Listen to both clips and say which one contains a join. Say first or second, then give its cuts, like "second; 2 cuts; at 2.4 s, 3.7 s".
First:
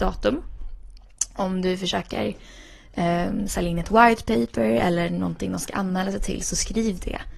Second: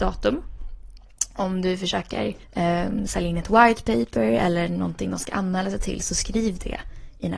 second; 1 cut; at 2.4 s